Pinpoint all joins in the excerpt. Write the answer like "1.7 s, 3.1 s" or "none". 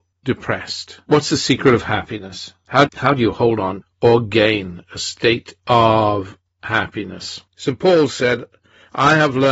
2.9 s, 3.8 s, 5.6 s, 7.5 s